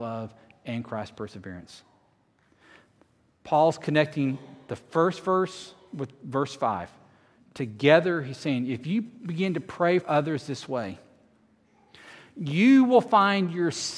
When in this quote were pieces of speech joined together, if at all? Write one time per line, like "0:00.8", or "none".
0:10.0